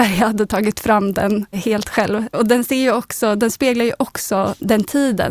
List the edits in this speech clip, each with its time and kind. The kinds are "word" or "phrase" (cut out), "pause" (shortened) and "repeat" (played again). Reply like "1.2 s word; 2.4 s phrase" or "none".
none